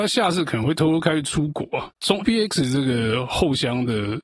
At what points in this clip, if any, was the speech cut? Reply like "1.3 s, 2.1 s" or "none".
2.2 s